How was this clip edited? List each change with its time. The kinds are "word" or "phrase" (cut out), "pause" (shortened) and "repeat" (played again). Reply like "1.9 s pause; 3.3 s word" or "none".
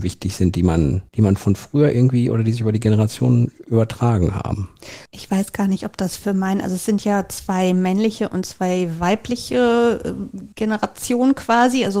1.1 s pause; 5.1 s pause; 10.5 s pause